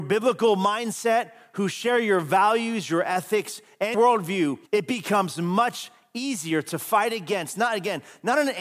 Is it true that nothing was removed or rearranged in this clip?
no; 2 cuts; at 3.9 s, 4.7 s

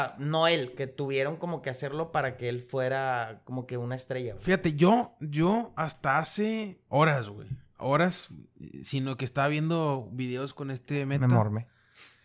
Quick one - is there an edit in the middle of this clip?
no; 0 cuts

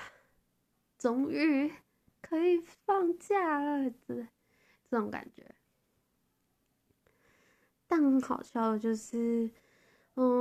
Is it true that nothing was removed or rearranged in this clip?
yes; 0 cuts

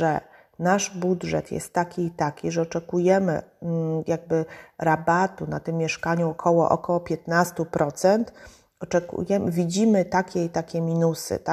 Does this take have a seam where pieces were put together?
no; 0 cuts

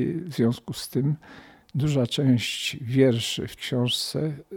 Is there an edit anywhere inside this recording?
yes; 1 cut; at 3.6 s

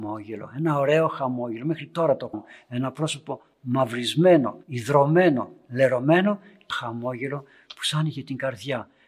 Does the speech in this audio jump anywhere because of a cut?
yes; 3 cuts; at 2.3 s, 4.6 s, 6.7 s

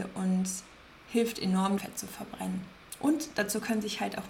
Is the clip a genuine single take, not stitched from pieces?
no; 1 cut; at 1.8 s

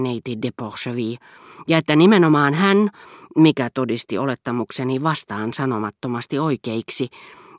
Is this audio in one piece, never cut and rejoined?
yes; 0 cuts

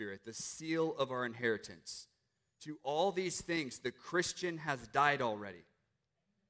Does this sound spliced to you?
no; 0 cuts

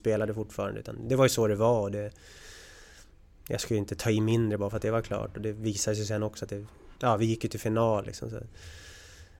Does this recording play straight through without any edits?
no; 1 cut; at 7.0 s

